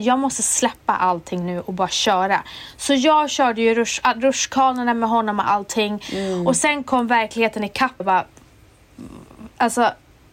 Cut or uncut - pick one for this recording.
cut